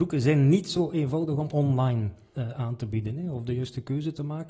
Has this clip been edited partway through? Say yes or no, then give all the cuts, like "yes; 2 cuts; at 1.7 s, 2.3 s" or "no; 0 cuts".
no; 0 cuts